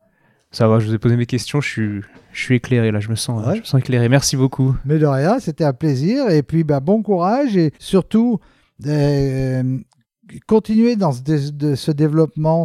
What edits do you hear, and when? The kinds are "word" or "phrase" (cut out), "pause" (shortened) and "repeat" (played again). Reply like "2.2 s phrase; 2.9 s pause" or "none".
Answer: 2.1 s pause; 7.7 s pause